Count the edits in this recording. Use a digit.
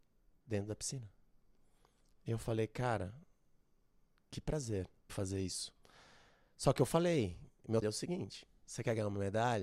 2